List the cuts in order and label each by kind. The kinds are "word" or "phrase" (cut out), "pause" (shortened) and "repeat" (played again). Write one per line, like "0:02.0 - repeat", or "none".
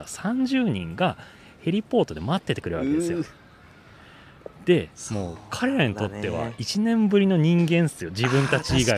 none